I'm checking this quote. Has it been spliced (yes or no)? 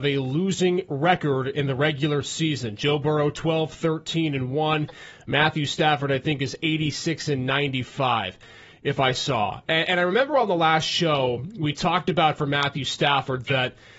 no